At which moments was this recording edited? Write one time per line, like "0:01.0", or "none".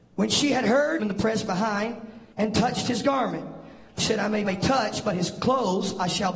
0:01.0
0:02.3
0:04.0
0:04.4

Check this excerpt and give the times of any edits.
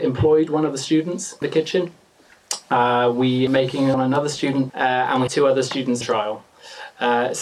0:01.4
0:03.5
0:03.9
0:04.7
0:05.3
0:06.0

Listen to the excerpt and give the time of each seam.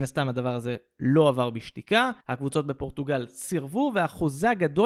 0:02.2

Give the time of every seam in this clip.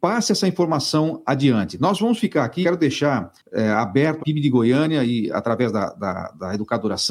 0:02.6
0:04.2

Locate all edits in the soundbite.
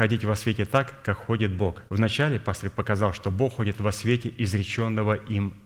0:01.9

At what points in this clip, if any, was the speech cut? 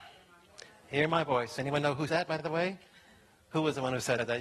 0:02.1

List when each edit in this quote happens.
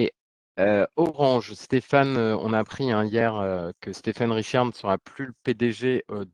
none

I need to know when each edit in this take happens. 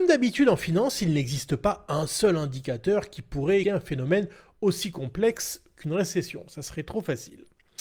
0:03.6

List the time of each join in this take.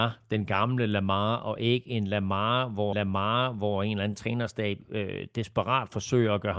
0:02.9

